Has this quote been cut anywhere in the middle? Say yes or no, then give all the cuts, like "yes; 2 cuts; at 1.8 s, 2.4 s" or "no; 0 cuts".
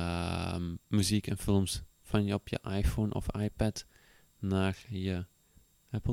no; 0 cuts